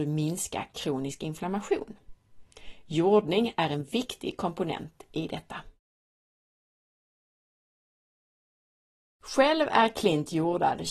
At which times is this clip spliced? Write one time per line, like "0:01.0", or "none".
none